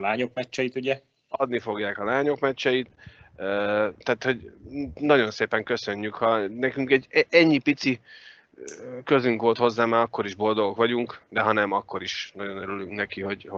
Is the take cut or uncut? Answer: cut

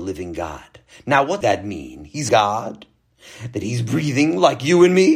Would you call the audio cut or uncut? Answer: cut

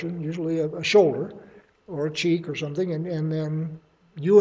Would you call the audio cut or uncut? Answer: uncut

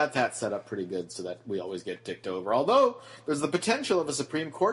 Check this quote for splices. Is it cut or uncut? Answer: uncut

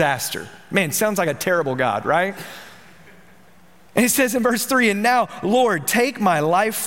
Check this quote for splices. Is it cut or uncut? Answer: uncut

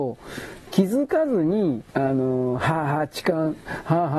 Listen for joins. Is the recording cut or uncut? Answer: cut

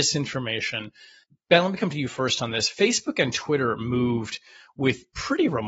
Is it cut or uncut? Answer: uncut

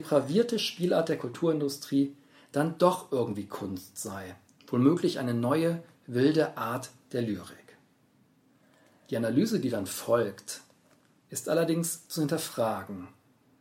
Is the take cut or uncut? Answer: cut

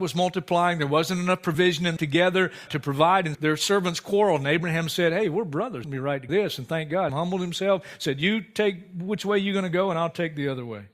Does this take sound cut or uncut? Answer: cut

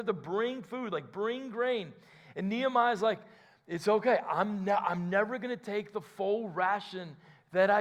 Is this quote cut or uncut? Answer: uncut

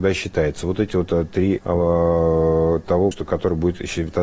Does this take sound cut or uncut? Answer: cut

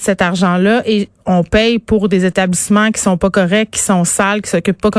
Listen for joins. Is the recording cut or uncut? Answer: uncut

